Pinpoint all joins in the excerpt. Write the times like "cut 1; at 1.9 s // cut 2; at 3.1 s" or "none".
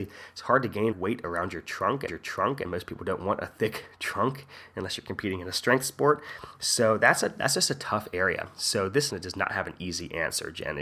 cut 1; at 0.9 s // cut 2; at 2.1 s // cut 3; at 9.1 s